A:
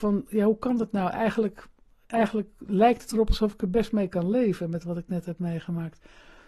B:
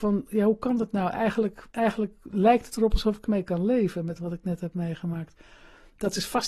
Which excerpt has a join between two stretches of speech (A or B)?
B